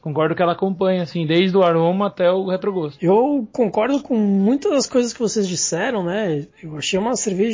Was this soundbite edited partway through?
no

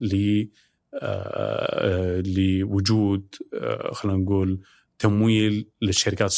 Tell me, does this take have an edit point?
no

